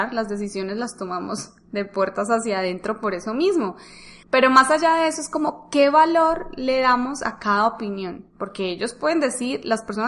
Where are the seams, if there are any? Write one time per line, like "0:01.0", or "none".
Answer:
0:04.2
0:08.3

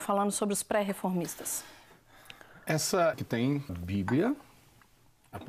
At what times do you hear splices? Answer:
0:03.1
0:03.7

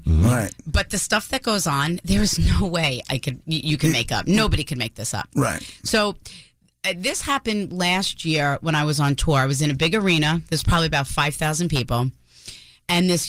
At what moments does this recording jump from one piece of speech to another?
none

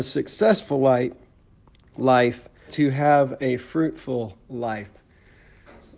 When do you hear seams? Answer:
0:02.7

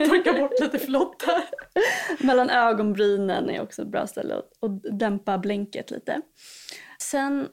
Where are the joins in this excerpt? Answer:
none

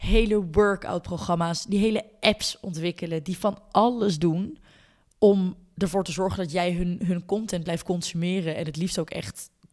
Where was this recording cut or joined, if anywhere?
none

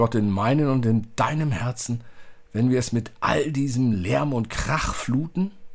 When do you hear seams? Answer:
none

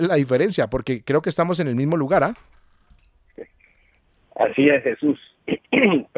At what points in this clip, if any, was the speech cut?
none

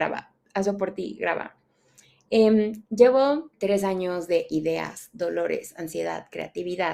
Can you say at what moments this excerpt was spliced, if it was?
0:03.5

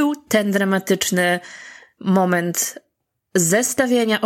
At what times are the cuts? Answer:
none

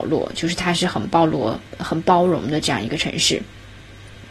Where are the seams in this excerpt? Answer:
0:01.7

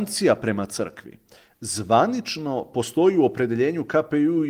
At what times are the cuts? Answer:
none

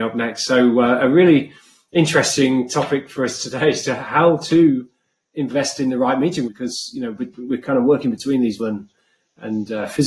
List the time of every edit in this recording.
0:06.5
0:08.6

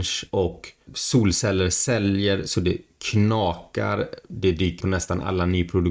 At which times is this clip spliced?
0:04.8

